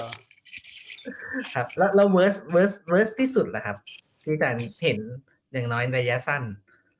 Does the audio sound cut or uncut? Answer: uncut